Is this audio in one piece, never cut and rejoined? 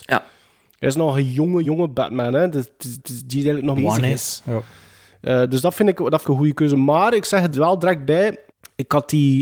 no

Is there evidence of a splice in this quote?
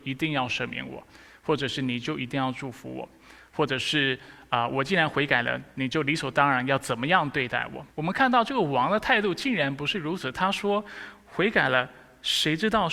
yes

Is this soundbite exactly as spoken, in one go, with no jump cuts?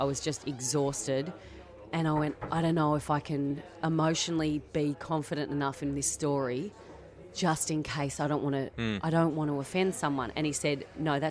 yes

